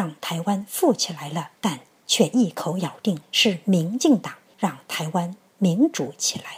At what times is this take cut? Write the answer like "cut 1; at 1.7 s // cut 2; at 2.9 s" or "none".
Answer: cut 1; at 1.6 s // cut 2; at 3.2 s